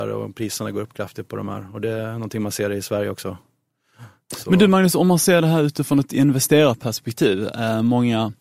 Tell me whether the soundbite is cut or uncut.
uncut